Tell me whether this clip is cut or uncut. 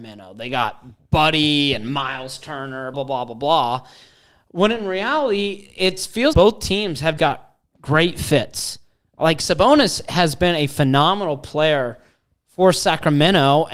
cut